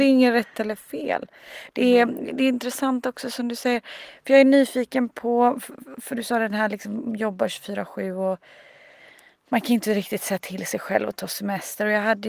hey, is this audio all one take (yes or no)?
yes